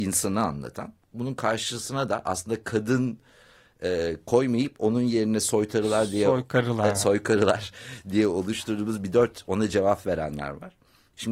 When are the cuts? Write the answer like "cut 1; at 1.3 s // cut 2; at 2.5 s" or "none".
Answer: none